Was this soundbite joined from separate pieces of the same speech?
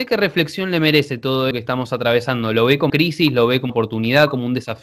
yes; 3 cuts; at 1.5 s, 2.9 s, 3.7 s

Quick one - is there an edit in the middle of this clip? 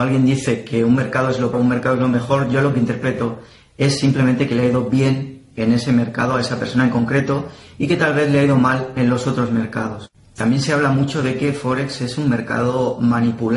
yes; 1 cut; at 1.5 s

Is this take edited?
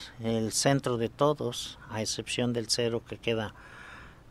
no; 0 cuts

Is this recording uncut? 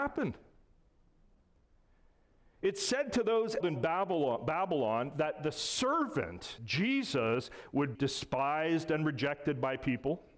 no; 3 cuts; at 3.6 s, 6.6 s, 7.9 s

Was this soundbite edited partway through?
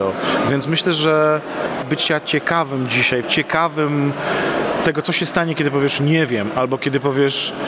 yes; 2 cuts; at 1.8 s, 3.2 s

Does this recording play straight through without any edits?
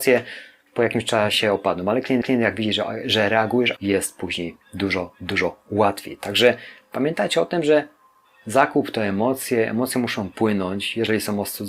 no; 3 cuts; at 2.2 s, 3.8 s, 4.6 s

